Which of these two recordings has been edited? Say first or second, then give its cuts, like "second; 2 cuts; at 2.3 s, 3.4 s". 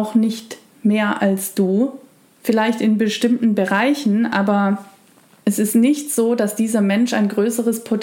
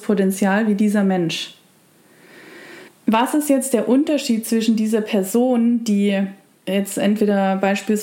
second; 1 cut; at 2.9 s